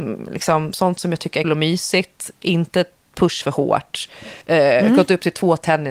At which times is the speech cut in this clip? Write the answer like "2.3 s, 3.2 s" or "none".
1.4 s, 3.4 s, 4.4 s